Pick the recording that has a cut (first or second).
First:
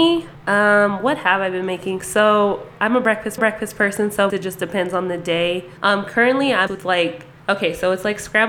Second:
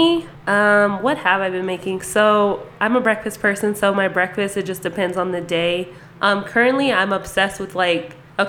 first